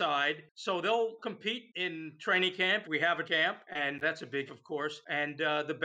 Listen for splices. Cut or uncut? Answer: cut